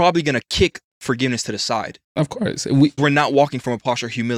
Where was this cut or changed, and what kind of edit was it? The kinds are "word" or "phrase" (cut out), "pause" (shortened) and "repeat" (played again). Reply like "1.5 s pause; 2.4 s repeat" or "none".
3.0 s word

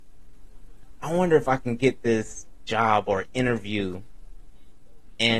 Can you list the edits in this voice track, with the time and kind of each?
none

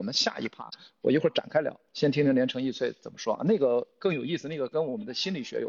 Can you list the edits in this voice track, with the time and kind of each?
1.9 s pause

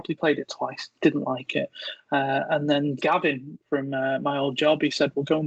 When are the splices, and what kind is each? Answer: 3.0 s phrase

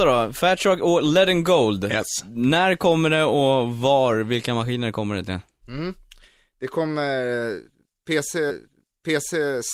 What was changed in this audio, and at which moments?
8.5 s repeat

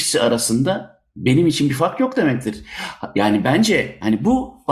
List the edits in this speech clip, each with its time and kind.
none

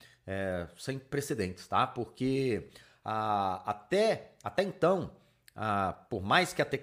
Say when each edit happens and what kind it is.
none

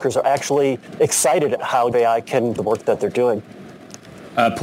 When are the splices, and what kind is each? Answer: 1.6 s word; 1.9 s word; 2.6 s phrase

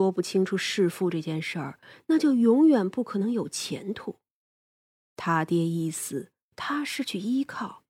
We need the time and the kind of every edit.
none

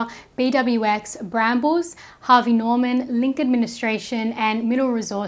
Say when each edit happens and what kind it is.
none

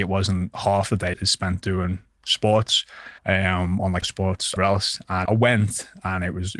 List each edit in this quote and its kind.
1.1 s word; 3.2 s pause; 4.0 s phrase; 4.6 s phrase; 5.2 s word

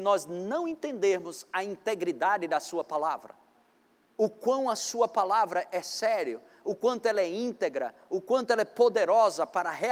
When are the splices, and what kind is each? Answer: none

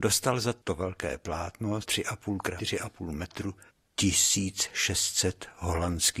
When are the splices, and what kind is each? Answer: 1.8 s word; 2.6 s word; 3.7 s pause

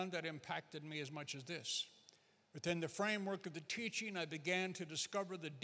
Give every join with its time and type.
none

